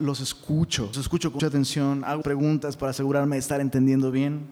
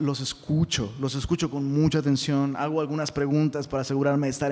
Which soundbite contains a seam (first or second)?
first